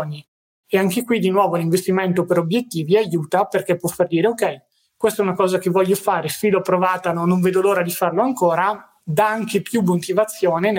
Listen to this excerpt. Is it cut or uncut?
uncut